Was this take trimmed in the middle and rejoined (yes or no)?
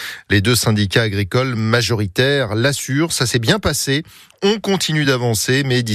no